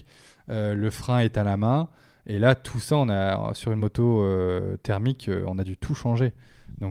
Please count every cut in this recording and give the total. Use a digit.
0